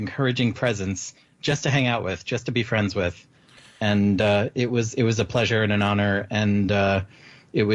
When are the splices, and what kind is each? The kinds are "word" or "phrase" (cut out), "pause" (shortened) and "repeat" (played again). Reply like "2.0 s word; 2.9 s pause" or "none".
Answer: none